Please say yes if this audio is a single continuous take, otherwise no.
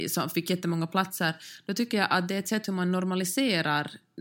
yes